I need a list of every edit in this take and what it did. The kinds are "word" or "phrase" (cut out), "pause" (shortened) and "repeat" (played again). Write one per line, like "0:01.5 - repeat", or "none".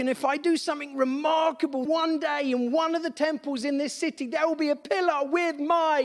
0:01.9 - word